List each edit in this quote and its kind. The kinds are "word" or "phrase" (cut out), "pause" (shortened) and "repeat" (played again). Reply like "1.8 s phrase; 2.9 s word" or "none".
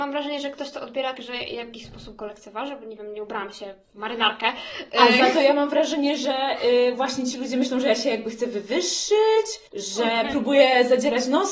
1.1 s word